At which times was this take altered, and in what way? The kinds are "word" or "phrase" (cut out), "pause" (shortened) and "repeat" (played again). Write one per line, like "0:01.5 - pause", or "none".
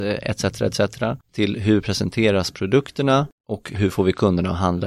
0:01.2 - pause
0:03.4 - pause